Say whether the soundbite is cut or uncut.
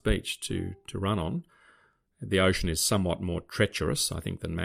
uncut